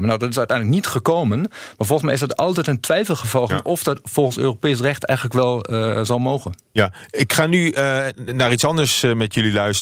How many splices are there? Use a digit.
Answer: 1